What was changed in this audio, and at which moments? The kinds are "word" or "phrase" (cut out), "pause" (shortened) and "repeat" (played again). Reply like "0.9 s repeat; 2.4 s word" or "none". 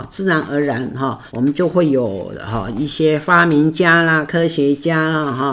1.3 s pause